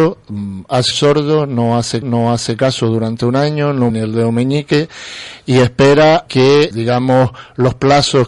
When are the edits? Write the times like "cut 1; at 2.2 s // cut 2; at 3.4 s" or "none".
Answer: cut 1; at 0.9 s // cut 2; at 2.0 s // cut 3; at 3.9 s // cut 4; at 6.3 s // cut 5; at 6.7 s